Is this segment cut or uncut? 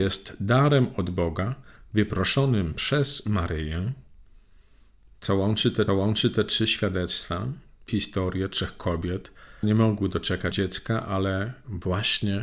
cut